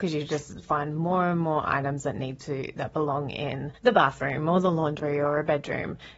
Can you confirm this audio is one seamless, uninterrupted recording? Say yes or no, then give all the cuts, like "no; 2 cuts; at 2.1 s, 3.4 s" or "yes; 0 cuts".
no; 1 cut; at 3.7 s